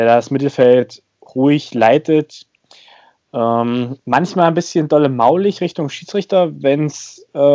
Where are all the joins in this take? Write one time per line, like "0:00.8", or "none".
none